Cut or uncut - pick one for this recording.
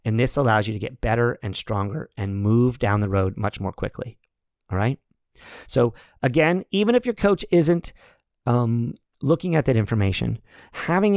uncut